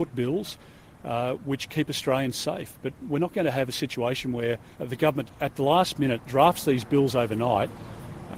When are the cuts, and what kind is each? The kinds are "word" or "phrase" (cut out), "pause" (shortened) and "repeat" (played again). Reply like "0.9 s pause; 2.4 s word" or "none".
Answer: 4.7 s pause; 5.2 s word